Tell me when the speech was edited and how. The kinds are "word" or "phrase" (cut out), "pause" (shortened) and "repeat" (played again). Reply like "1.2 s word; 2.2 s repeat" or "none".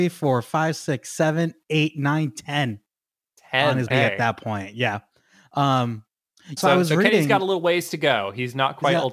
3.9 s word; 6.6 s word